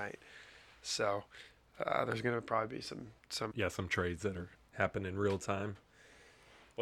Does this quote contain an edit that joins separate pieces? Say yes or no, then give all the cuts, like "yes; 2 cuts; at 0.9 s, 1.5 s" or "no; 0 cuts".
yes; 2 cuts; at 3.5 s, 4.5 s